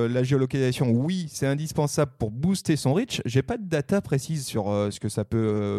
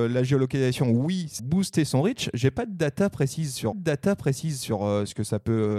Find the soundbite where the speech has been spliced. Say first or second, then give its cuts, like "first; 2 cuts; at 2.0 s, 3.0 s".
second; 2 cuts; at 1.4 s, 3.7 s